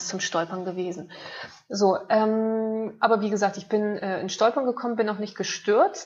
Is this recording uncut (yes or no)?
yes